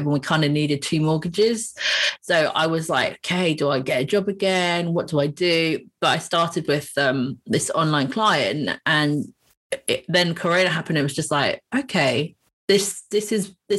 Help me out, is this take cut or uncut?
uncut